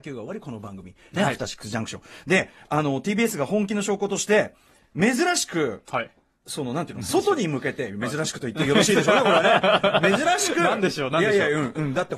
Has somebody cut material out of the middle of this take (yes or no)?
no